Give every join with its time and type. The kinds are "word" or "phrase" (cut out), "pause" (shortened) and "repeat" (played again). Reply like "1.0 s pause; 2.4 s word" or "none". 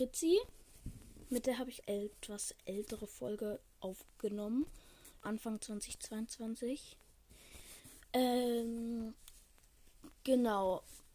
1.8 s phrase; 5.2 s word; 8.0 s pause